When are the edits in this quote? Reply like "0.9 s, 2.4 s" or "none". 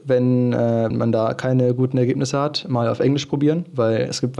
0.9 s